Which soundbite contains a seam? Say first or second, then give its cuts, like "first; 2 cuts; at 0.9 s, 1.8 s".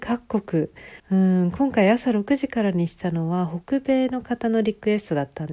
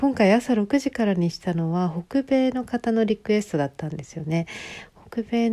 first; 1 cut; at 1.0 s